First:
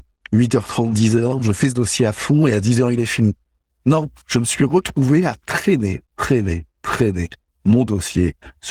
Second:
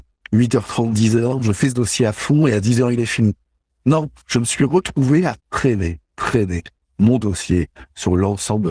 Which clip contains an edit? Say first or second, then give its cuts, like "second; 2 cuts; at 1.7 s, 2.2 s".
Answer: second; 1 cut; at 5.4 s